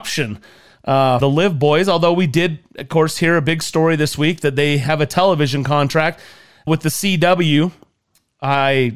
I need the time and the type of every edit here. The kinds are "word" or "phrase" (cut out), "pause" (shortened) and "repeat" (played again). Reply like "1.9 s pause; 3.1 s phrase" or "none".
1.2 s word; 6.7 s word